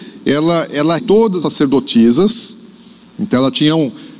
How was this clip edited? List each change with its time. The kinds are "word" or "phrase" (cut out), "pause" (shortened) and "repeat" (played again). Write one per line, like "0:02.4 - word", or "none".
0:01.0 - word
0:01.4 - word